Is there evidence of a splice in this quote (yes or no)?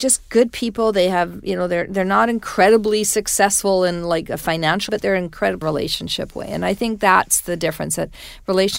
yes